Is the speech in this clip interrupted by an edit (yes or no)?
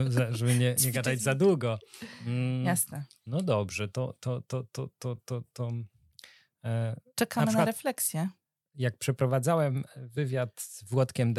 no